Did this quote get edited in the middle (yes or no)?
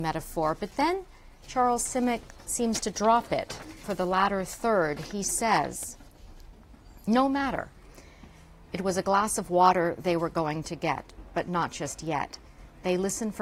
no